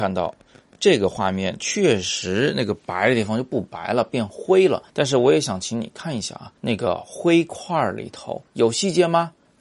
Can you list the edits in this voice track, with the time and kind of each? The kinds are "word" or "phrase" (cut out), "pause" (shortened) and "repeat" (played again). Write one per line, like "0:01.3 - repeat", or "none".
0:04.9 - pause
0:06.6 - pause
0:08.5 - pause